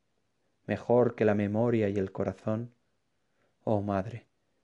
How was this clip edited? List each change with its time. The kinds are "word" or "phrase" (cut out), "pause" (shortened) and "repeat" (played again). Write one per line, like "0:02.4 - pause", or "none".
none